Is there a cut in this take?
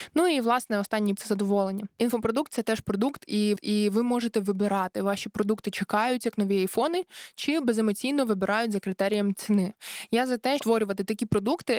yes; 3 cuts; at 1.2 s, 3.6 s, 10.6 s

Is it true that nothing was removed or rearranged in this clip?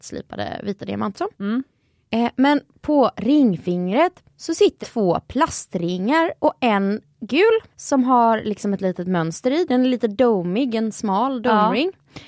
no; 4 cuts; at 1.1 s, 4.3 s, 4.8 s, 7.7 s

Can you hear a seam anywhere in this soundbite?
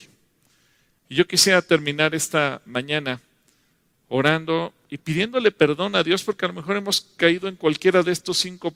yes; 1 cut; at 4.8 s

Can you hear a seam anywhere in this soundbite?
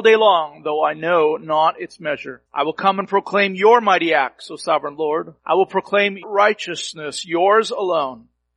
yes; 3 cuts; at 2.5 s, 5.4 s, 6.2 s

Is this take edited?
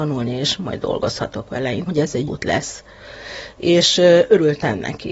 yes; 2 cuts; at 1.9 s, 2.3 s

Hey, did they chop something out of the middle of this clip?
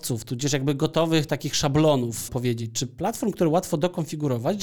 yes; 1 cut; at 2.3 s

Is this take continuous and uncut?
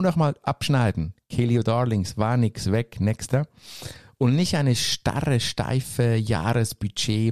yes; 0 cuts

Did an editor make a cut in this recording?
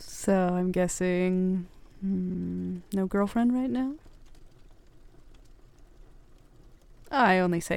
no; 0 cuts

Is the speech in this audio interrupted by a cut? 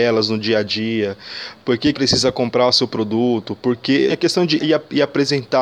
yes; 3 cuts; at 1.9 s, 4.1 s, 4.6 s

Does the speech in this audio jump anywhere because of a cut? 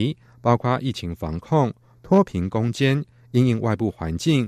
no; 0 cuts

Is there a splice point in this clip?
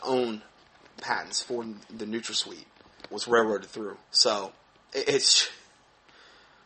yes; 3 cuts; at 1.0 s, 3.1 s, 4.0 s

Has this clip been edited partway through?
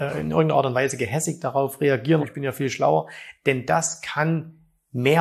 yes; 1 cut; at 2.2 s

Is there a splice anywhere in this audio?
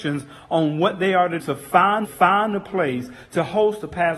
yes; 2 cuts; at 1.4 s, 2.0 s

